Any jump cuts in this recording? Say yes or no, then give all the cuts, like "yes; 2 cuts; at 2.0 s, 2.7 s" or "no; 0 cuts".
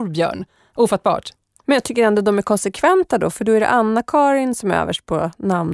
no; 0 cuts